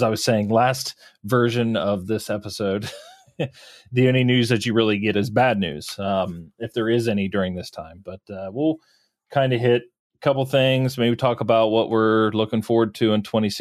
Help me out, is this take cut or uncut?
uncut